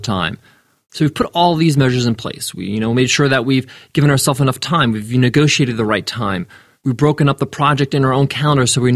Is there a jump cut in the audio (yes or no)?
no